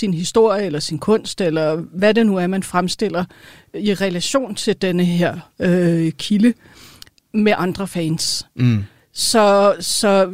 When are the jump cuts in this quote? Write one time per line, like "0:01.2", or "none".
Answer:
none